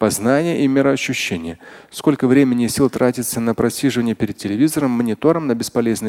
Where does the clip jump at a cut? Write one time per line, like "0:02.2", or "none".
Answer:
none